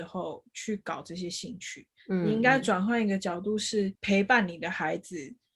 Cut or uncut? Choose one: cut